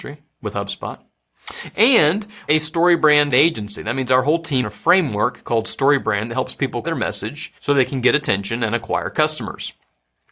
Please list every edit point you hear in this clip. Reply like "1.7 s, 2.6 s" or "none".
2.5 s, 3.3 s, 4.6 s, 6.8 s, 7.6 s